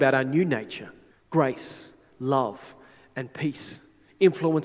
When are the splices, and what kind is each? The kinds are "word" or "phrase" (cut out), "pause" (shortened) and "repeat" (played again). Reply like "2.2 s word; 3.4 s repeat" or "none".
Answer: 1.1 s pause